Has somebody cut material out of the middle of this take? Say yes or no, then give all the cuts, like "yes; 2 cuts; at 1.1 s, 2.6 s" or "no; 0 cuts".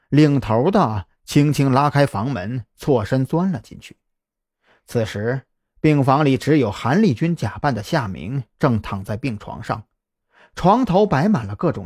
no; 0 cuts